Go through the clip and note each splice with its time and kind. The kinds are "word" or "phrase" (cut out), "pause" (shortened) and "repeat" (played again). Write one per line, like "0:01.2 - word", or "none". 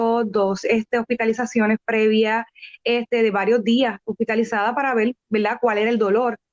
none